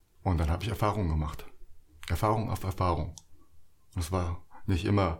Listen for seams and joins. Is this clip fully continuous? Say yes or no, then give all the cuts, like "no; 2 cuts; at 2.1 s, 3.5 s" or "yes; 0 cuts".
yes; 0 cuts